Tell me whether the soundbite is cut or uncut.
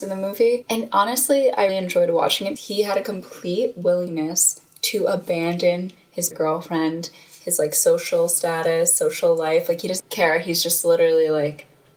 cut